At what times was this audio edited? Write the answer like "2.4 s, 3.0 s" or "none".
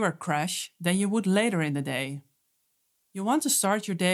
none